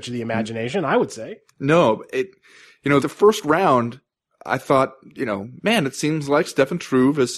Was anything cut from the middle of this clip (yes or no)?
yes